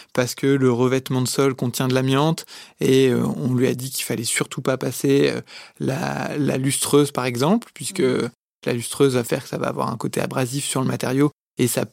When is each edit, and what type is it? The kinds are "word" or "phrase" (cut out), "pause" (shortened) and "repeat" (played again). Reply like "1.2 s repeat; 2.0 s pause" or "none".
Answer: none